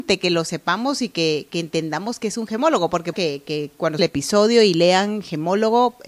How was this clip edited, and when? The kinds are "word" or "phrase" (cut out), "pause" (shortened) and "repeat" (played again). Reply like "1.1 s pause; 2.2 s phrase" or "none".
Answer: 3.1 s phrase; 4.0 s phrase